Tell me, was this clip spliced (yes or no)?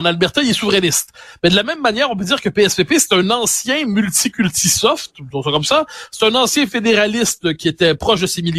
no